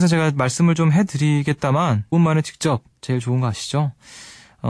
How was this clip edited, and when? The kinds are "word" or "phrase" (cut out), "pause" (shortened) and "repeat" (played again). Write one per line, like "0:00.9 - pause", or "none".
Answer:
0:02.1 - word
0:02.9 - word